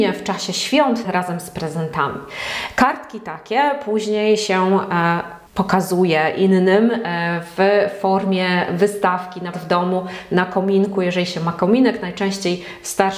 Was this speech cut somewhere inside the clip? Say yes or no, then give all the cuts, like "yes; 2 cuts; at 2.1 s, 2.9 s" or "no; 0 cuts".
yes; 3 cuts; at 1.0 s, 5.5 s, 9.5 s